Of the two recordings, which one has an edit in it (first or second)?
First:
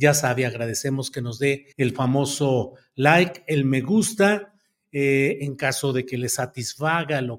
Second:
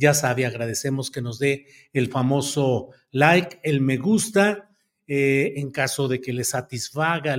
first